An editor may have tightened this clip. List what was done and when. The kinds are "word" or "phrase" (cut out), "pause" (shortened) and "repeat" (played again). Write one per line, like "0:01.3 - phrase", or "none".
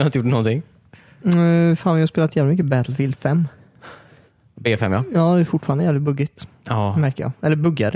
none